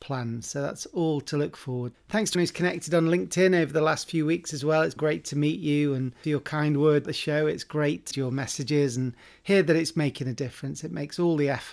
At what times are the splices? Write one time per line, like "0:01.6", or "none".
0:01.9
0:02.3
0:05.0
0:06.2
0:07.0
0:08.1

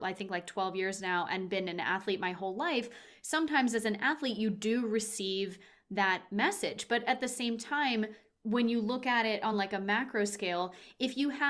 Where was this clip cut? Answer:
none

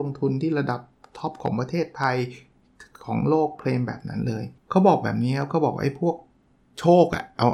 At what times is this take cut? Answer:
0:04.6

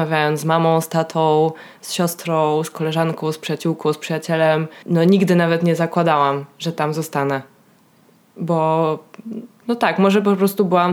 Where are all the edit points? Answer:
none

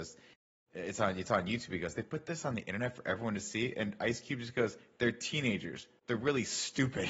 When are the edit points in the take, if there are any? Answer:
none

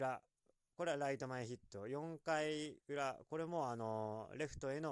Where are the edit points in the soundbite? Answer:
none

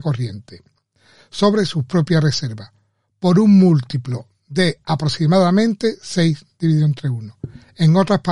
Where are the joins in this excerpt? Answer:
none

